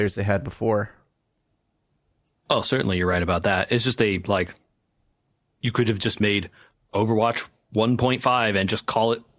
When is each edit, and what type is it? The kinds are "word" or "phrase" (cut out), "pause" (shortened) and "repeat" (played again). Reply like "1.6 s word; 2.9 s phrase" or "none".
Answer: none